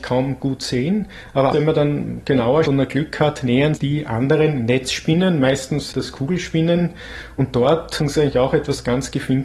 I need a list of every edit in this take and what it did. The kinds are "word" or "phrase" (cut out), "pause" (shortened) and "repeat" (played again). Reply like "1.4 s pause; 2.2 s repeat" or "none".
1.5 s word; 2.6 s word; 3.8 s word; 5.9 s word; 8.0 s word